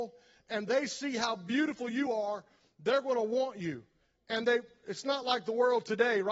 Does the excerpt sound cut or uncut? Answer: uncut